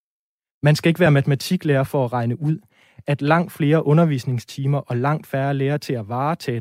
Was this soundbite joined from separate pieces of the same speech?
no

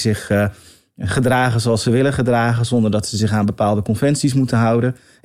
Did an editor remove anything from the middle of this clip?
no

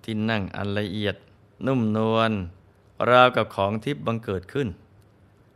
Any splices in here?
yes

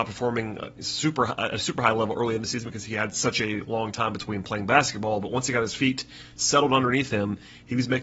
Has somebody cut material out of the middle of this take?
no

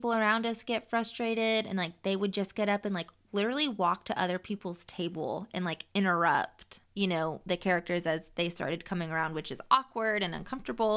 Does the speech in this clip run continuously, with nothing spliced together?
no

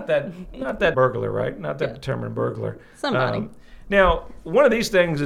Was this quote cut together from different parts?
yes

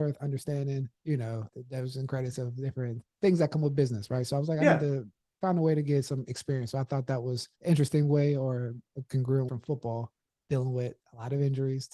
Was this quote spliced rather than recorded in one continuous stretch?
yes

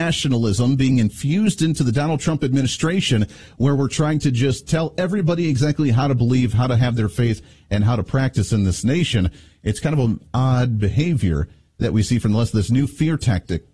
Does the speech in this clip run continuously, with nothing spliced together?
yes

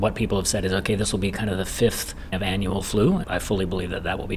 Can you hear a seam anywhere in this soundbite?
yes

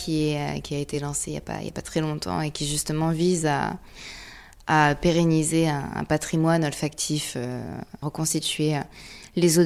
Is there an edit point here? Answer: no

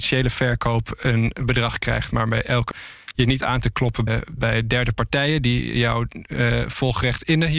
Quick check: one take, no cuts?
no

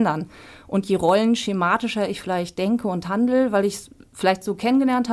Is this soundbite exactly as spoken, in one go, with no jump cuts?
yes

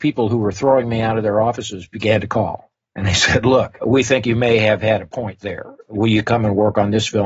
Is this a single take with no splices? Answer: no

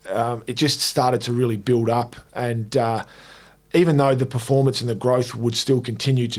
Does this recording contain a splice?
no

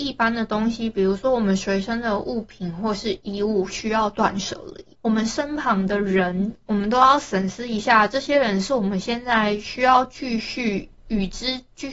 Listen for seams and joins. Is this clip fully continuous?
no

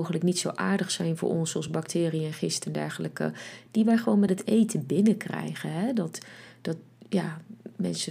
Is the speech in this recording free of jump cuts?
yes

